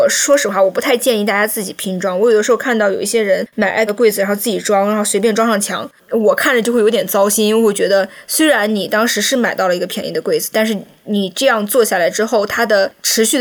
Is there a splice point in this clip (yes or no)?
yes